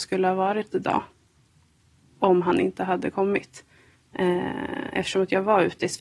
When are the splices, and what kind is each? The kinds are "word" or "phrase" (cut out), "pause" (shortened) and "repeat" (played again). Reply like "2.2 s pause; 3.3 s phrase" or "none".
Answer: none